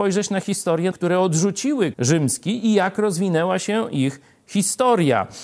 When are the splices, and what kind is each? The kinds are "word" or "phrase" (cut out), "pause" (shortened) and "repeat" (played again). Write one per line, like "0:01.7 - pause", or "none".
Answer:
0:00.9 - phrase
0:01.9 - word